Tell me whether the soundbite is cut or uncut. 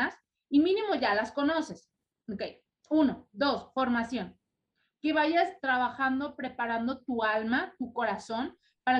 cut